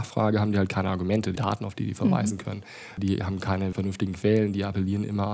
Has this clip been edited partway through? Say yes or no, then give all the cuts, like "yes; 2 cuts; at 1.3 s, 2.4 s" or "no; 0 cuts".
yes; 3 cuts; at 1.4 s, 3.0 s, 3.7 s